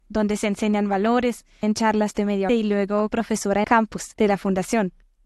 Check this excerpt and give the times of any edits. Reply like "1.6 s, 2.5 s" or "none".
1.6 s, 2.5 s, 3.1 s, 3.6 s